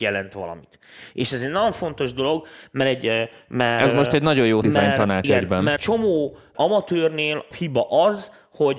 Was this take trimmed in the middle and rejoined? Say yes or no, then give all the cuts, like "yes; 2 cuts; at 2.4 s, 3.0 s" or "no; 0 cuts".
yes; 5 cuts; at 4.6 s, 5.2 s, 5.8 s, 6.5 s, 7.5 s